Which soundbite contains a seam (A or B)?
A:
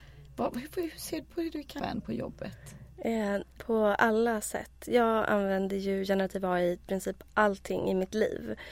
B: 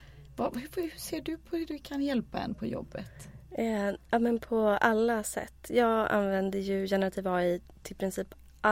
A